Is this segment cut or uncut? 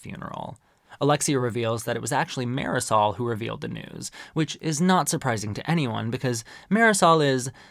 uncut